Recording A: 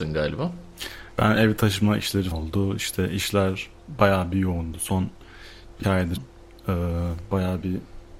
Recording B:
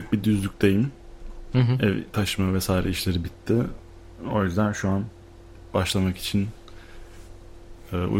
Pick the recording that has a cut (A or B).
A